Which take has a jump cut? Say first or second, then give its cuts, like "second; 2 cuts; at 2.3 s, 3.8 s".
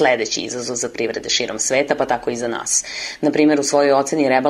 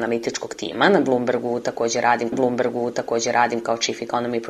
second; 1 cut; at 2.3 s